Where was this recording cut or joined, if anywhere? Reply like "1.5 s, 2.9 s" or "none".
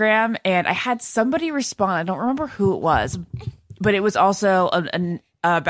none